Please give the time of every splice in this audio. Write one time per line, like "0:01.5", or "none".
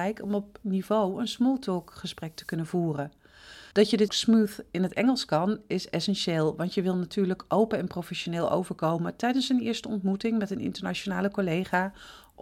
0:03.7
0:04.1

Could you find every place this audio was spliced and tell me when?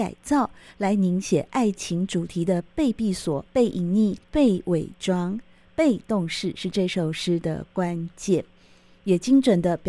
0:03.5
0:04.2

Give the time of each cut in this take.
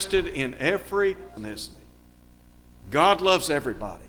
0:01.4

